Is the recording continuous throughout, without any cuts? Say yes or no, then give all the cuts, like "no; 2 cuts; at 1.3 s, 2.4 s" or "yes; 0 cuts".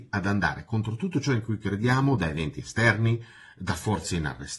yes; 0 cuts